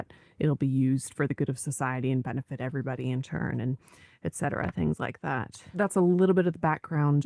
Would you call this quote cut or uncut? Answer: uncut